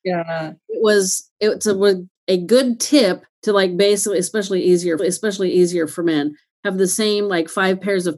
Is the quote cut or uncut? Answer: cut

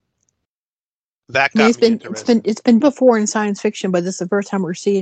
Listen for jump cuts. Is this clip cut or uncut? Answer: cut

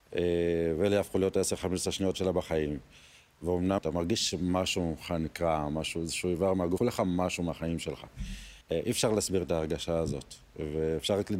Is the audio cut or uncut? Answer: cut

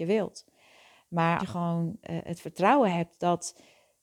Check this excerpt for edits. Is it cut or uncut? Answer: cut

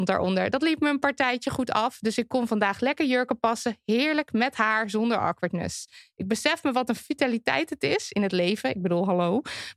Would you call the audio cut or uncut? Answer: uncut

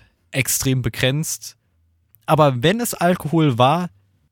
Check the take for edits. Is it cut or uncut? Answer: uncut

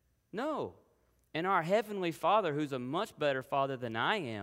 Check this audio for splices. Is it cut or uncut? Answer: uncut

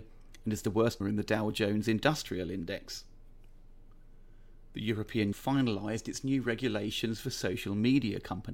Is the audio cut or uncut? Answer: cut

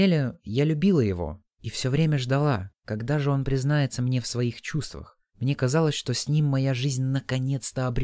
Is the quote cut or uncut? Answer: cut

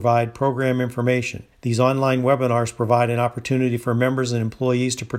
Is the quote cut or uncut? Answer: cut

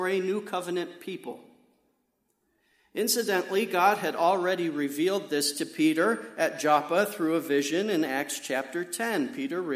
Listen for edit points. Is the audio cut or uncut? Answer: uncut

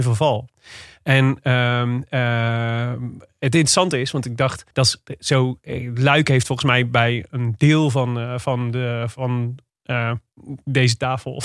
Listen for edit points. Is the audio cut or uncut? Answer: cut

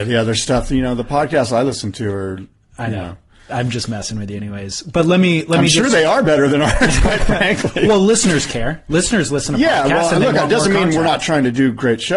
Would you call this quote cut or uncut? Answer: uncut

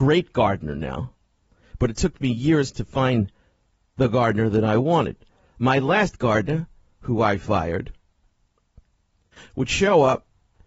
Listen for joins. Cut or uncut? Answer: uncut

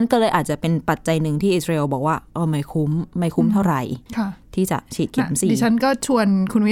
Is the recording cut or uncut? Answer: cut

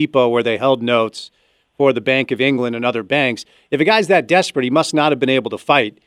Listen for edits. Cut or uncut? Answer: uncut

